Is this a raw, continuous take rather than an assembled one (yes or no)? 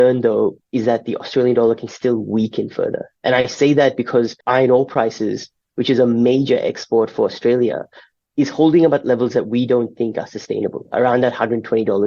no